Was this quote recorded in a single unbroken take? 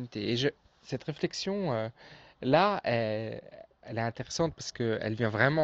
yes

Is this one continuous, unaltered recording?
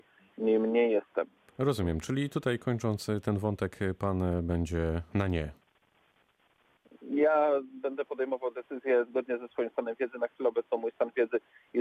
yes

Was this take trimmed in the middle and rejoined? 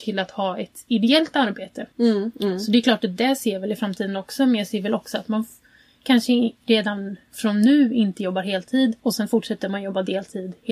yes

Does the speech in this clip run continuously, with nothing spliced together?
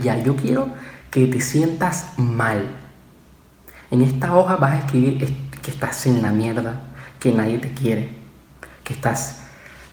yes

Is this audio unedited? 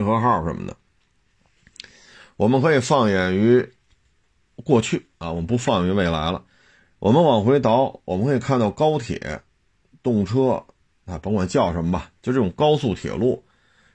yes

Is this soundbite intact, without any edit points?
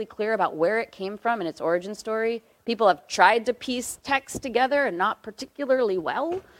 yes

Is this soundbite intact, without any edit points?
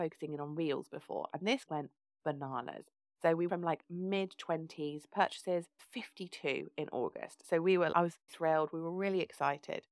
no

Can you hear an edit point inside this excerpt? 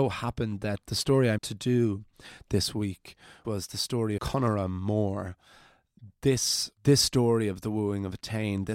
yes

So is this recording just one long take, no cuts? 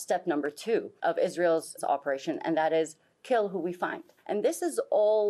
no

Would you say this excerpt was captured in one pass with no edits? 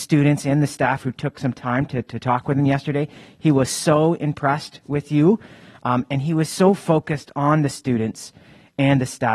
yes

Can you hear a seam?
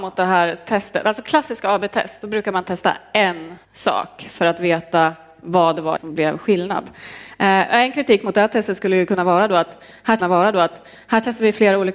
yes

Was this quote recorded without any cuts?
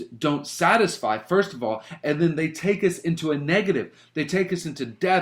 yes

